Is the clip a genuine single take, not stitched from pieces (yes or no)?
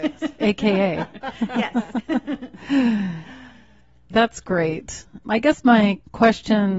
no